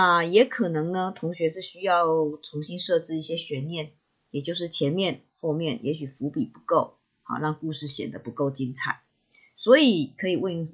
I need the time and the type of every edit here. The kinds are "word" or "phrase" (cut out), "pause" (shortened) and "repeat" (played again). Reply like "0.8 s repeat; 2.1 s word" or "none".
none